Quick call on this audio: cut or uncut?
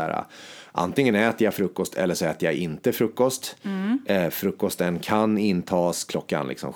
uncut